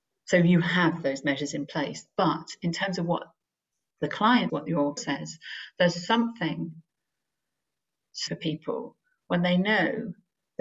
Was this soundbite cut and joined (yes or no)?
yes